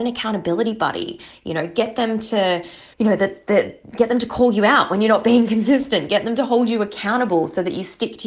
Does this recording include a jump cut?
yes; 1 cut; at 2.9 s

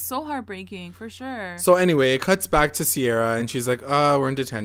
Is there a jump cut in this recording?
no; 0 cuts

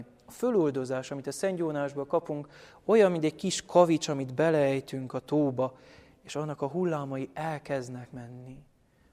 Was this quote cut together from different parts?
no; 0 cuts

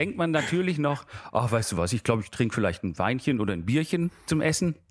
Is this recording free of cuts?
yes; 0 cuts

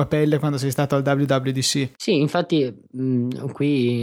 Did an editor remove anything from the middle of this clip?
yes; 1 cut; at 1.9 s

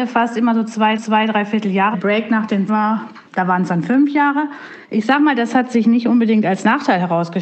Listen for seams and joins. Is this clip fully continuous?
no; 5 cuts; at 1.0 s, 1.9 s, 2.7 s, 3.3 s, 4.8 s

